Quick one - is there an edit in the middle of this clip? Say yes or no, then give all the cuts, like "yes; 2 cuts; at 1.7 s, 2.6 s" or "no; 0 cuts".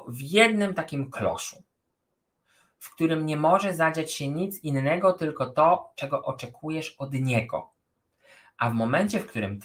no; 0 cuts